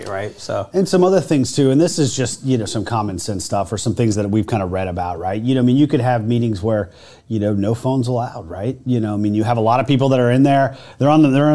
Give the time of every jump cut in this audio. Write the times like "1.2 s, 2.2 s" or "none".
none